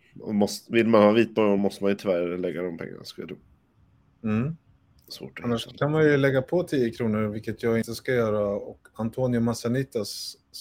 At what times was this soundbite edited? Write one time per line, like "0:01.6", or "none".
none